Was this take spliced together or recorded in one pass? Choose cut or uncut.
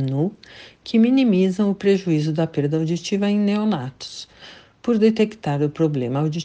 uncut